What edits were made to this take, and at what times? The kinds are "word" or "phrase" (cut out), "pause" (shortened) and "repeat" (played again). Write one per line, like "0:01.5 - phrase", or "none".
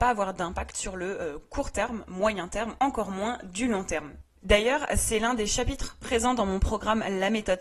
none